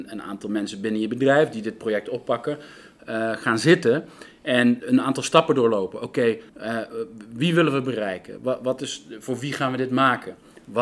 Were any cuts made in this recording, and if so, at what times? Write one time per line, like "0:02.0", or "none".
0:04.8
0:06.5